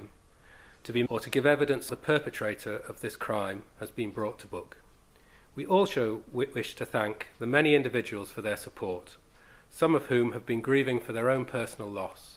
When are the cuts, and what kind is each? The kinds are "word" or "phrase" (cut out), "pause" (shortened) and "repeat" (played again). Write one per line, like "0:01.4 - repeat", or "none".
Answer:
0:01.1 - phrase
0:01.9 - phrase
0:05.1 - pause

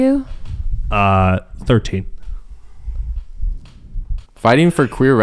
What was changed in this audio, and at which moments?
0:04.3 - pause

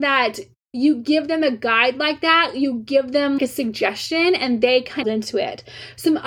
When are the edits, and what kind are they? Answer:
0:03.4 - word
0:05.0 - phrase

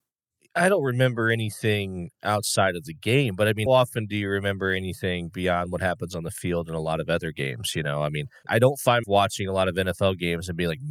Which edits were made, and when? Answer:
0:03.7 - word
0:08.5 - word
0:09.0 - word

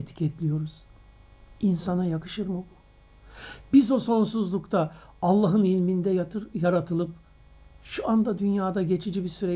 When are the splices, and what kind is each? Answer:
none

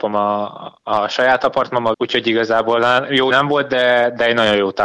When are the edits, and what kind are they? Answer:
0:01.9 - word
0:03.3 - word

